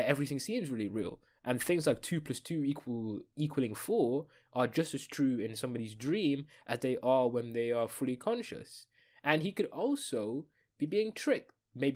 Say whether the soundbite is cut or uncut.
uncut